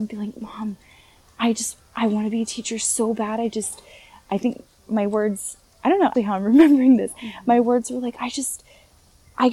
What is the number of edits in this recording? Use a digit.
1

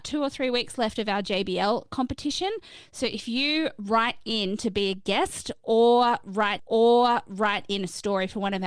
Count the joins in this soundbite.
1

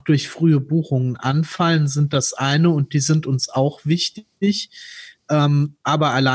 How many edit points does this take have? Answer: 0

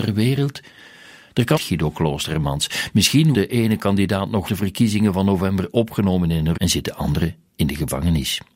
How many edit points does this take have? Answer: 4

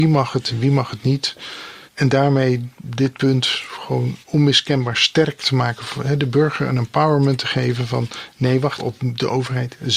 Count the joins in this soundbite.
2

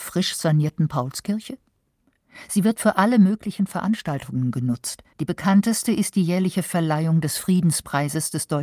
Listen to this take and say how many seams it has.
1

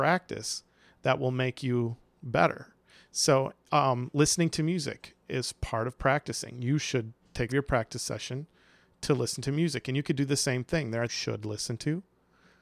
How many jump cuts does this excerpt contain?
2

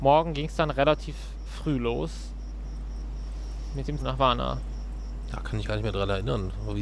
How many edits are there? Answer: 2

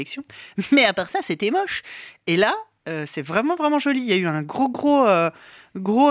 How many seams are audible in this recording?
0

